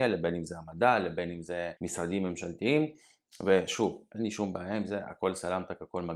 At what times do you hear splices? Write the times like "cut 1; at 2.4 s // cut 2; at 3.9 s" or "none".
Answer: cut 1; at 1.8 s